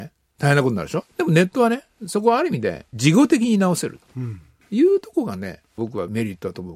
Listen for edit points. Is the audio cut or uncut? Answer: uncut